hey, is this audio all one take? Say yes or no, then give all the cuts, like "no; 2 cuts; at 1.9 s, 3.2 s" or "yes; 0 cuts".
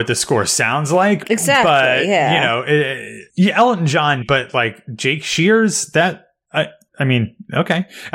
no; 3 cuts; at 1.2 s, 3.3 s, 4.2 s